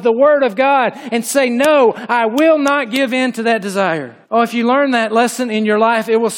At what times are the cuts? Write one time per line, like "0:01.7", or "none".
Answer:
0:04.2

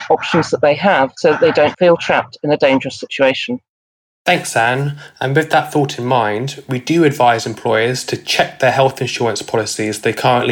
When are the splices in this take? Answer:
none

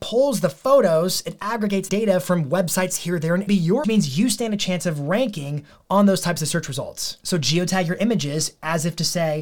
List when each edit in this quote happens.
0:01.9
0:03.5
0:03.8

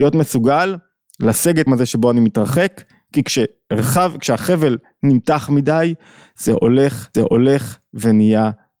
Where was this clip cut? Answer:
0:01.7
0:07.1

